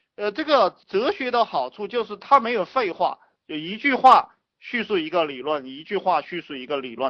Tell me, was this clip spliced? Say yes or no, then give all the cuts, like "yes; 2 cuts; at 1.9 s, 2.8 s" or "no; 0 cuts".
no; 0 cuts